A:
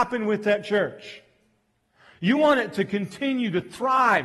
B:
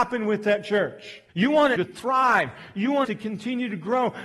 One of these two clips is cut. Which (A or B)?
B